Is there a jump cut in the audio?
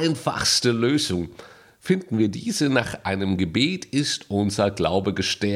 no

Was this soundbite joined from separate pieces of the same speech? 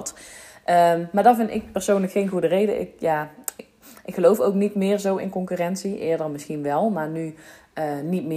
no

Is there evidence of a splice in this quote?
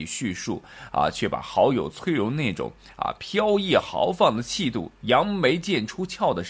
no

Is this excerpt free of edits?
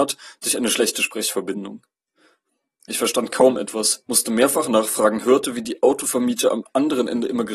yes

